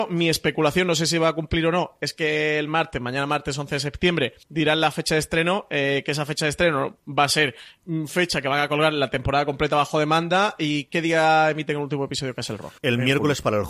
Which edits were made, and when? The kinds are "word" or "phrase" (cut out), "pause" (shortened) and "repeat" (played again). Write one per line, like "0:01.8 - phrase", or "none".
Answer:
0:04.4 - pause
0:12.8 - pause